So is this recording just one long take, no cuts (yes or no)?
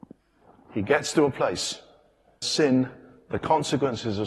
no